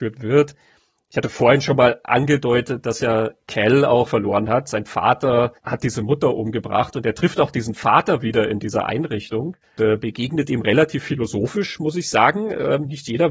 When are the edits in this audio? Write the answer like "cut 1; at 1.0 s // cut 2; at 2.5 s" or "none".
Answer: cut 1; at 4.1 s // cut 2; at 5.6 s // cut 3; at 9.8 s